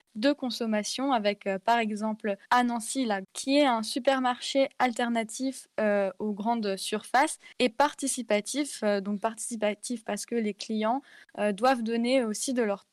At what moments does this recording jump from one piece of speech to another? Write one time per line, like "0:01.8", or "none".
0:02.4
0:03.2
0:07.5